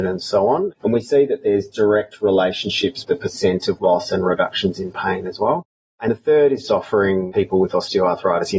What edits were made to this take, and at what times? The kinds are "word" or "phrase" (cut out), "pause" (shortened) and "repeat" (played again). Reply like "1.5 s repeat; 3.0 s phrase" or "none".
3.0 s word; 3.8 s word; 6.1 s word; 6.6 s word

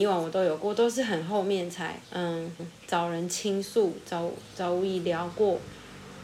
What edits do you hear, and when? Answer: 2.0 s pause; 2.6 s repeat

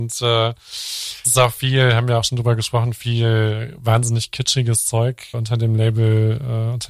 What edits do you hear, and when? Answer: 1.2 s word; 5.3 s word

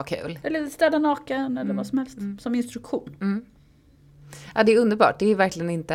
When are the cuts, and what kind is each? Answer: none

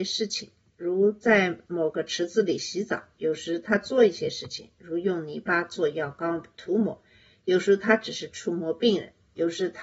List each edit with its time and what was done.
none

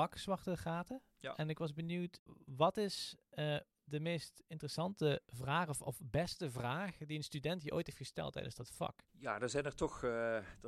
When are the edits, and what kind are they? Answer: 9.1 s pause

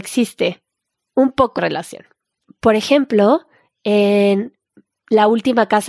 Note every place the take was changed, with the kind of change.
1.6 s word

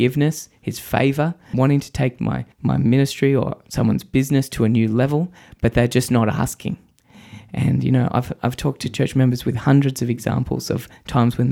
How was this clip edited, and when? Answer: 1.5 s word; 2.5 s pause

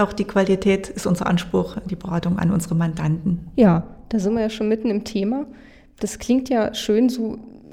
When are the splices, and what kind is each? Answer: none

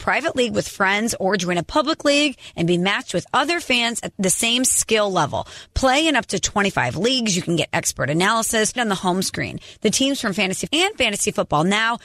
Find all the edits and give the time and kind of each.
4.1 s word; 8.8 s word; 10.7 s word

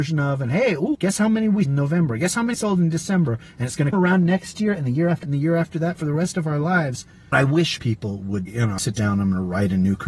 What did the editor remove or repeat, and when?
0.9 s word; 1.6 s word; 2.5 s word; 3.9 s word; 5.2 s word; 7.3 s word; 7.8 s word; 8.5 s word; 8.8 s word

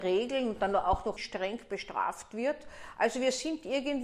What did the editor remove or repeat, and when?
1.2 s word

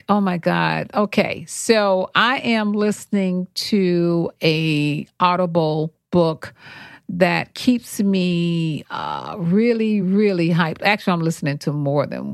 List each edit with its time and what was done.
none

